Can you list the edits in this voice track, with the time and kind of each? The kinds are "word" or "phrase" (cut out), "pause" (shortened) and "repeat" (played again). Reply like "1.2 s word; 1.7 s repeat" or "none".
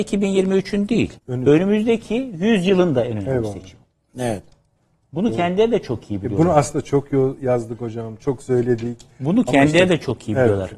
1.2 s pause; 3.9 s pause